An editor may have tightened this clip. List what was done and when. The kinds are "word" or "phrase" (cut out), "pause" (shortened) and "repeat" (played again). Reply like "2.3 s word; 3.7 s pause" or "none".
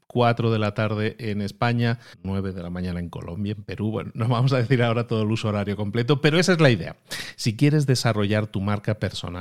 2.1 s pause